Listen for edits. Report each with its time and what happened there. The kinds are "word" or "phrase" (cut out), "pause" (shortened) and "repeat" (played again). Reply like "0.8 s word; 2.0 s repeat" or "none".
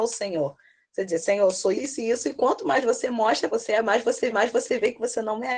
1.7 s word; 3.5 s phrase; 4.3 s repeat